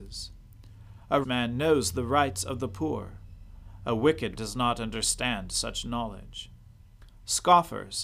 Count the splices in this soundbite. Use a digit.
2